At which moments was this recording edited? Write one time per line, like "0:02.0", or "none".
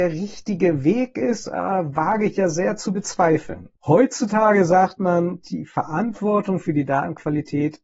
none